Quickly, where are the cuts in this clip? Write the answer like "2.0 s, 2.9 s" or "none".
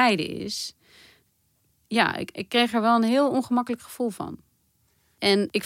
none